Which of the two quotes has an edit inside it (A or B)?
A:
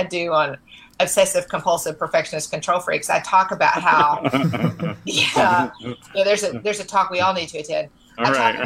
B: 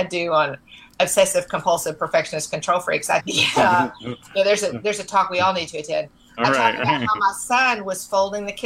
B